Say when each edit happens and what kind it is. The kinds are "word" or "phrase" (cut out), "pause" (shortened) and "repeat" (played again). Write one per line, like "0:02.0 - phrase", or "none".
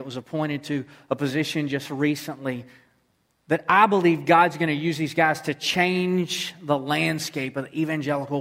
none